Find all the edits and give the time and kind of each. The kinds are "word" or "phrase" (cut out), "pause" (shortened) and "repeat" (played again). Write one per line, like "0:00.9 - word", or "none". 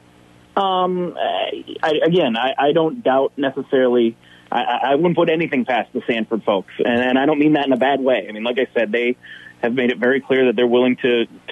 none